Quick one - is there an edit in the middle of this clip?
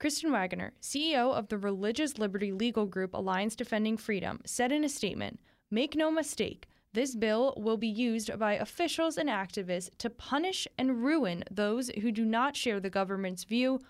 no; 0 cuts

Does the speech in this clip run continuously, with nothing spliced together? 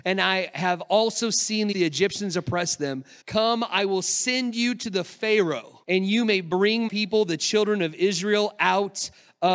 no; 4 cuts; at 1.7 s, 3.2 s, 5.8 s, 6.9 s

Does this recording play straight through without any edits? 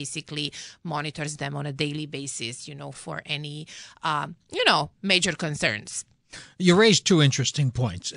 no; 1 cut; at 2.9 s

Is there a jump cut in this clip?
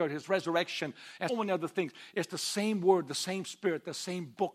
yes; 1 cut; at 1.3 s

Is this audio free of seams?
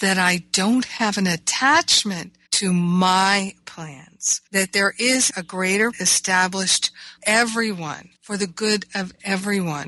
no; 6 cuts; at 2.5 s, 4.5 s, 5.3 s, 5.9 s, 7.2 s, 8.1 s

